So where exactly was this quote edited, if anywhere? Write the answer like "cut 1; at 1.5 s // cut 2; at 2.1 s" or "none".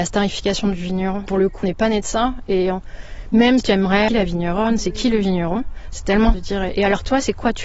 cut 1; at 1.6 s // cut 2; at 3.6 s // cut 3; at 4.1 s // cut 4; at 6.3 s

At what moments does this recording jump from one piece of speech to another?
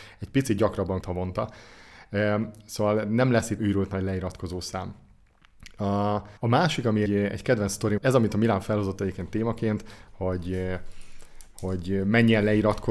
cut 1; at 1.0 s // cut 2; at 3.6 s // cut 3; at 6.4 s // cut 4; at 7.1 s // cut 5; at 8.0 s

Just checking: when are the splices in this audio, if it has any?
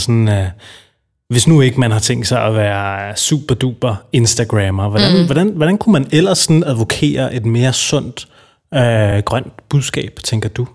none

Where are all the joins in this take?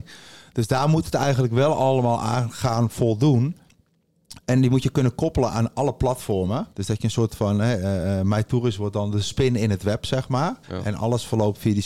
cut 1; at 6.7 s // cut 2; at 10.6 s

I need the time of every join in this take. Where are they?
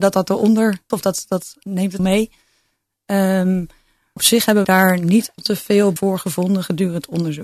cut 1; at 0.9 s // cut 2; at 1.6 s // cut 3; at 2.0 s // cut 4; at 4.2 s // cut 5; at 4.6 s // cut 6; at 5.4 s // cut 7; at 6.0 s

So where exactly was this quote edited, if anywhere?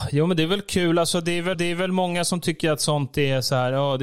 cut 1; at 1.5 s

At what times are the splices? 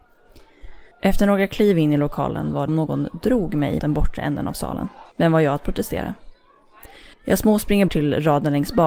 cut 1; at 0.9 s // cut 2; at 2.7 s // cut 3; at 3.8 s // cut 4; at 5.1 s // cut 5; at 7.1 s // cut 6; at 7.9 s

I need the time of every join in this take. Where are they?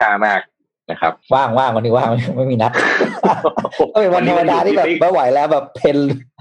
cut 1; at 1.2 s

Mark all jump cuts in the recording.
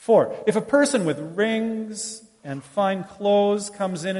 none

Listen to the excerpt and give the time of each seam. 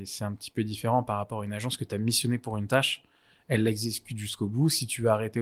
none

